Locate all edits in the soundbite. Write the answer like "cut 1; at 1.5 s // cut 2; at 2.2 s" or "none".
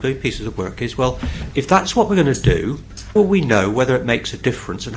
cut 1; at 1.5 s // cut 2; at 3.2 s

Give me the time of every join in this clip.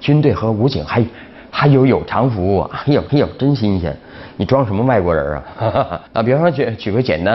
cut 1; at 3.1 s // cut 2; at 6.1 s

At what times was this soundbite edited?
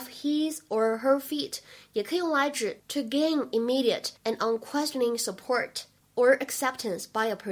cut 1; at 4.2 s // cut 2; at 6.0 s

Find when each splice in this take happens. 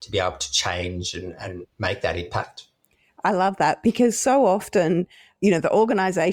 none

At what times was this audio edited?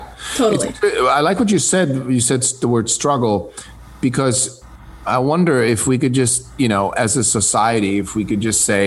none

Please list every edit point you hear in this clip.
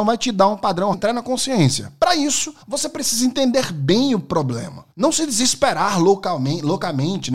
cut 1; at 0.9 s // cut 2; at 2.6 s // cut 3; at 4.9 s

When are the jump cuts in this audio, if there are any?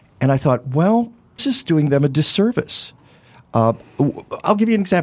cut 1; at 1.4 s

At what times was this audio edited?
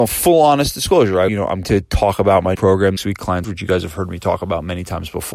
cut 1; at 1.3 s // cut 2; at 1.6 s // cut 3; at 2.5 s // cut 4; at 3.0 s // cut 5; at 3.4 s

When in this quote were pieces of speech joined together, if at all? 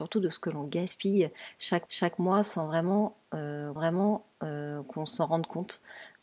cut 1; at 1.9 s // cut 2; at 3.8 s

